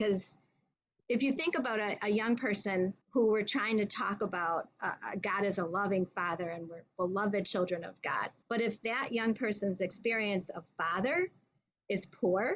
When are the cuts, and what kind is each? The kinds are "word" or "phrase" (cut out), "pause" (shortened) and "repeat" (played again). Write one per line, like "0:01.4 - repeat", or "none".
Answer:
0:03.0 - pause